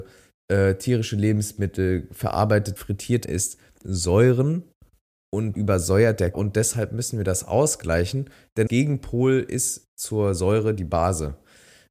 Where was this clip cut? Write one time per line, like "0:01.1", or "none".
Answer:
0:02.8
0:03.2
0:03.8
0:05.5
0:06.3
0:08.7